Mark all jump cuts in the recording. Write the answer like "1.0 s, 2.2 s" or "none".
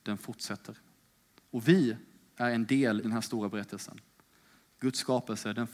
3.0 s